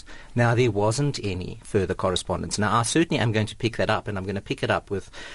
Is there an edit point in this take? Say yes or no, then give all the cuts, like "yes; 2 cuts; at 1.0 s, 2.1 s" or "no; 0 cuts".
no; 0 cuts